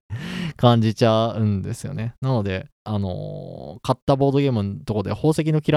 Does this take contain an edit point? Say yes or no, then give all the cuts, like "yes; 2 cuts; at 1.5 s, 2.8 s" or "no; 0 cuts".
yes; 1 cut; at 2.7 s